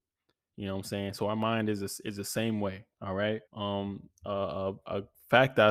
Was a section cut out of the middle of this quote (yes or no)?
yes